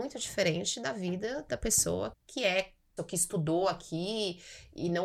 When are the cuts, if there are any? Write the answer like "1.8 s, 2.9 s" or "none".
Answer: 2.1 s, 3.0 s